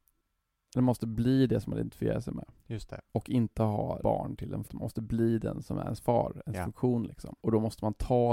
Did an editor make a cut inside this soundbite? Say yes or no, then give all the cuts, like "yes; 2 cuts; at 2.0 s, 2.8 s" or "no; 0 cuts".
yes; 4 cuts; at 3.1 s, 4.0 s, 4.6 s, 7.4 s